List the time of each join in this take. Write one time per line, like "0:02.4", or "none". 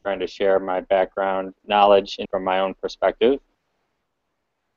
0:01.6
0:02.3